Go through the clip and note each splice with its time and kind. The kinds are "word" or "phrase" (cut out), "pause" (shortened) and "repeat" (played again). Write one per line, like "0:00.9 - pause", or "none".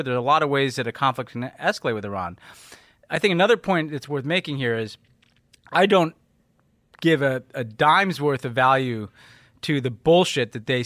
none